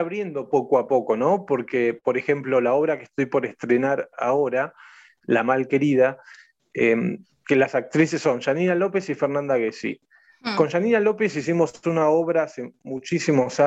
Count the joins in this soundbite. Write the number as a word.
zero